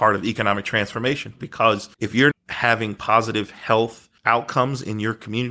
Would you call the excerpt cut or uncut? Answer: cut